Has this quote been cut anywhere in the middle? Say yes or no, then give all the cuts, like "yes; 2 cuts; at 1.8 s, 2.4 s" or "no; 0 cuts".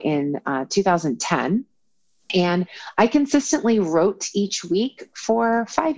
no; 0 cuts